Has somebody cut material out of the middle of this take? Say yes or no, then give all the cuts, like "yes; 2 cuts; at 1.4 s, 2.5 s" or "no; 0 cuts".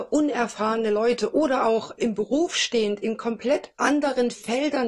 yes; 1 cut; at 2.0 s